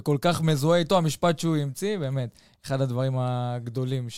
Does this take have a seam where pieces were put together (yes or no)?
no